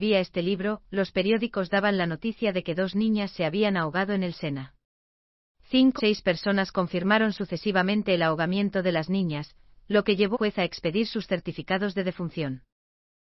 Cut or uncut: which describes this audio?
cut